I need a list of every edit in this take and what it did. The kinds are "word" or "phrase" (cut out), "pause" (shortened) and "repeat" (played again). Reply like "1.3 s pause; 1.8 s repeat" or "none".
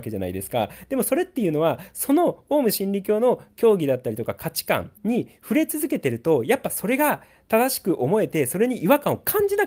5.0 s pause